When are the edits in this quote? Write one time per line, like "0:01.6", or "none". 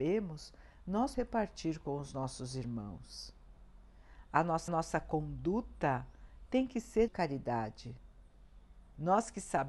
0:01.1
0:04.7
0:07.1